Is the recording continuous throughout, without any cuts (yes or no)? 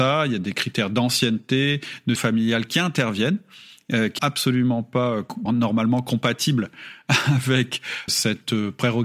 no